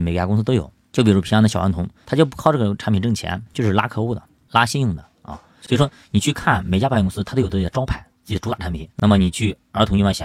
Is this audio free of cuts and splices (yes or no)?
yes